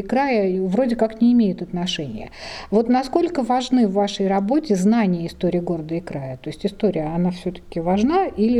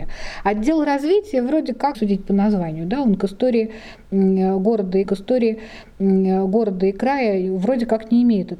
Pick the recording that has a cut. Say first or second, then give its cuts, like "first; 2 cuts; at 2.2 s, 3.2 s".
second; 2 cuts; at 1.9 s, 5.0 s